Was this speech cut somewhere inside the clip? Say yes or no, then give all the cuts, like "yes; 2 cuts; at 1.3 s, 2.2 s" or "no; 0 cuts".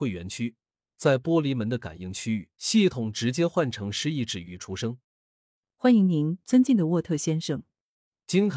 yes; 2 cuts; at 2.5 s, 5.0 s